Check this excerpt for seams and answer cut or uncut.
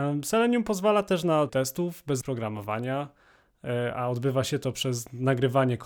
cut